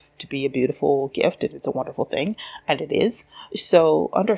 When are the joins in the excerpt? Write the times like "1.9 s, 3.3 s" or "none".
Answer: none